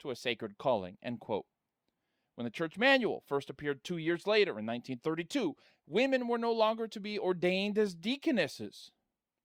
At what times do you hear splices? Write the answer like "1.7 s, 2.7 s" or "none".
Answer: none